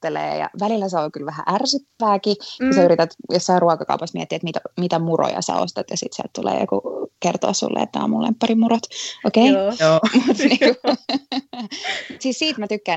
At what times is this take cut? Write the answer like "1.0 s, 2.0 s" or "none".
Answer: none

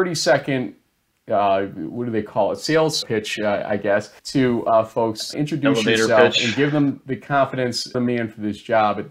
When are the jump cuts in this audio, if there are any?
3.0 s, 4.2 s, 5.3 s, 7.9 s

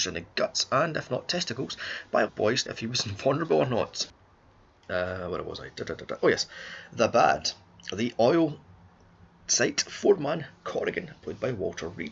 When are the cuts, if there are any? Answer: 2.3 s, 2.7 s

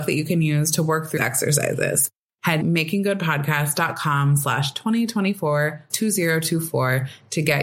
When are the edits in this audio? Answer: 1.2 s, 2.6 s, 5.9 s

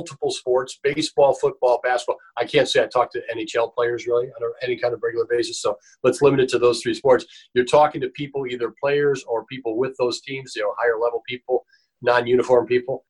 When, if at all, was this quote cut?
none

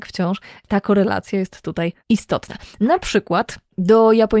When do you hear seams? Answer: 2.0 s

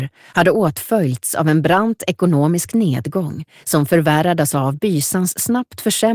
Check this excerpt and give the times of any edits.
none

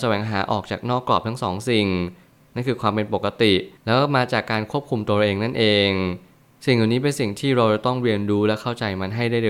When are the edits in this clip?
3.8 s

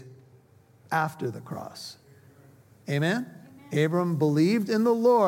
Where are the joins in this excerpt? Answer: none

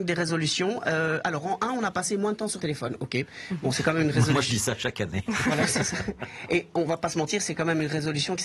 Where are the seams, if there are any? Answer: 2.6 s

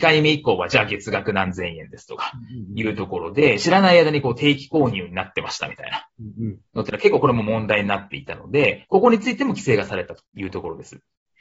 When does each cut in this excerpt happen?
10.3 s

